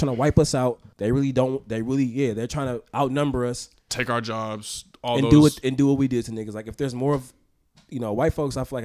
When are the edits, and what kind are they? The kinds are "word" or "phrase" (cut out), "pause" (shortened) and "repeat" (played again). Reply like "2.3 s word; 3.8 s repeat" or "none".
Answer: 0.9 s pause